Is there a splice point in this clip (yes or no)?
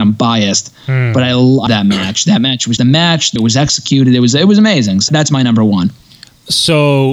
yes